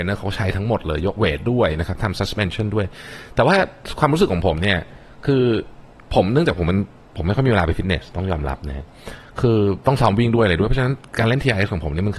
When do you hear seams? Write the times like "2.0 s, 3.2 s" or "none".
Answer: none